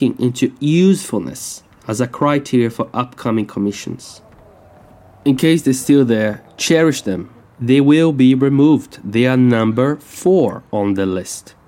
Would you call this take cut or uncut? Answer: uncut